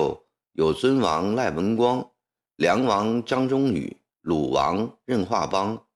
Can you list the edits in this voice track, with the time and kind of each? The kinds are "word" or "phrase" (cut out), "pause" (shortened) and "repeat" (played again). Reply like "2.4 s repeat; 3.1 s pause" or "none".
4.1 s pause